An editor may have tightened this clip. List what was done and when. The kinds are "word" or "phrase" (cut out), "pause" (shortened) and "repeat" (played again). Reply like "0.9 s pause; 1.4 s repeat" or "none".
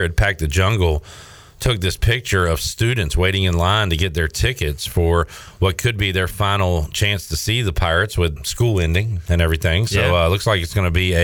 8.4 s word

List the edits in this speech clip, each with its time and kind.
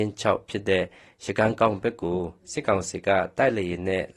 none

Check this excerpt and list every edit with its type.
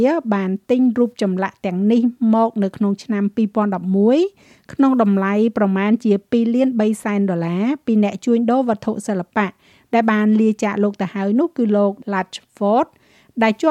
12.0 s word

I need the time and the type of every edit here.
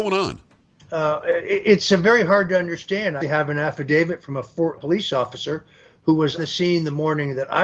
3.2 s word; 4.8 s word; 6.4 s word

